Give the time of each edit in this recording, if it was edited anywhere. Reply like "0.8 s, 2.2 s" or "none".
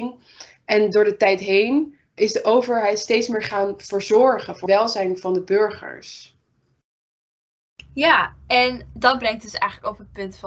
2.2 s, 4.7 s